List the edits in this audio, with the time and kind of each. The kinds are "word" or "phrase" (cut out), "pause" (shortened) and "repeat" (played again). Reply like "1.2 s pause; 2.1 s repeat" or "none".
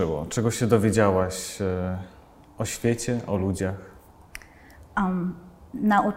none